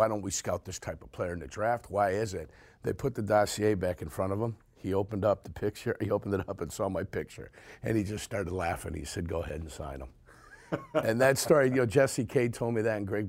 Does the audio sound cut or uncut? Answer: uncut